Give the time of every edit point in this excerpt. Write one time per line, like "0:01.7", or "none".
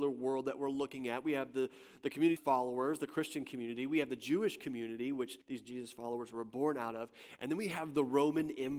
0:02.4
0:05.4

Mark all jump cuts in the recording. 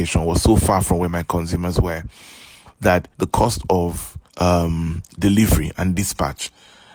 0:03.1
0:04.3

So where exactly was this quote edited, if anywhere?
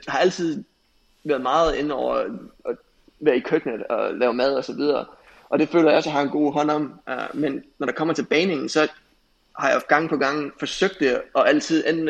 none

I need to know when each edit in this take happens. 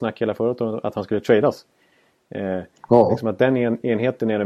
none

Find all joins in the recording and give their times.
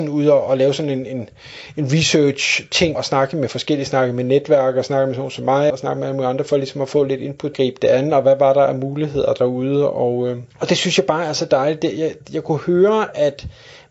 0:02.9
0:05.7
0:07.5
0:10.5

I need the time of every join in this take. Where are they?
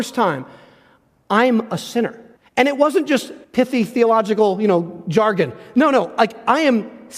0:02.4
0:03.4

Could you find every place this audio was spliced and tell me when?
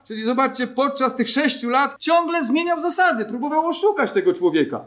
0:02.0

